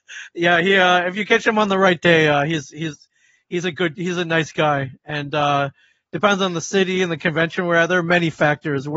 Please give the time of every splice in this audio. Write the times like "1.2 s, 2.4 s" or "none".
none